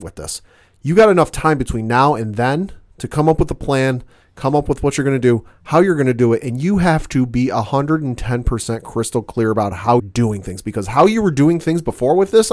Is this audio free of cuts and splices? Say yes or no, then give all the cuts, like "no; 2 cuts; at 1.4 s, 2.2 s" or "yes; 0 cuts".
no; 1 cut; at 10.0 s